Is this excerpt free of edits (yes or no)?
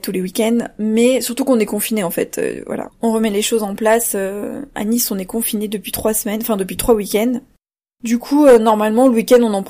yes